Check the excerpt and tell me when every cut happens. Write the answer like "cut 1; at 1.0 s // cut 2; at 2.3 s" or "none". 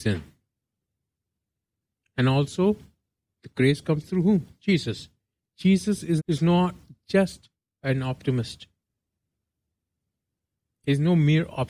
cut 1; at 6.2 s